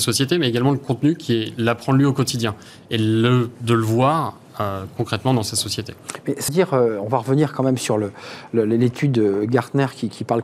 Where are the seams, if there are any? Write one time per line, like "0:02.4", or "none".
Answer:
0:06.5